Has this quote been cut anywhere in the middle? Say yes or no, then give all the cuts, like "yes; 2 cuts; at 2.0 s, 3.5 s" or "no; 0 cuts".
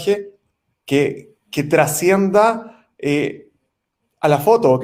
no; 0 cuts